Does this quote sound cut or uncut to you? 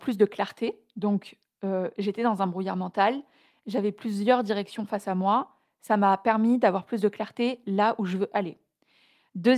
uncut